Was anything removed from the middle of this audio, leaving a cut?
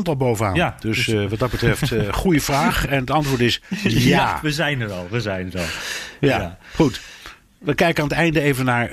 no; 0 cuts

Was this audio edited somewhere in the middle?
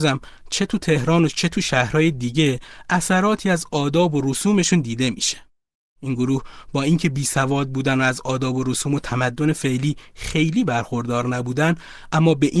no; 0 cuts

